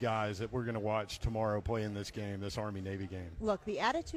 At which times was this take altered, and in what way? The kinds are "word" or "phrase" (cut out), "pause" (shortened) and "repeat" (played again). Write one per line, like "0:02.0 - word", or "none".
none